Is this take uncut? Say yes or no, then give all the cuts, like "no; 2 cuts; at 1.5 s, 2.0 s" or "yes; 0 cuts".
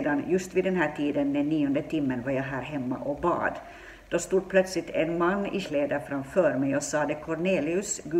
no; 1 cut; at 5.6 s